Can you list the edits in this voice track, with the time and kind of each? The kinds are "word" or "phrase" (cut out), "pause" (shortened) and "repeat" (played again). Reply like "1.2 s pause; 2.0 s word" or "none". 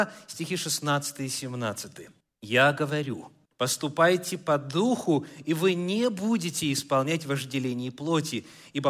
2.2 s pause; 3.4 s pause